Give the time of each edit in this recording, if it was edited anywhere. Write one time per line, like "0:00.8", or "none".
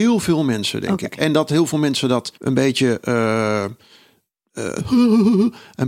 0:02.4